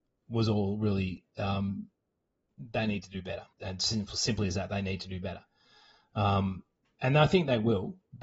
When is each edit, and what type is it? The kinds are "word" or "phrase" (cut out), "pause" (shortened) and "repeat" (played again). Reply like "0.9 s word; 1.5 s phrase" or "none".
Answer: 3.5 s pause; 6.8 s pause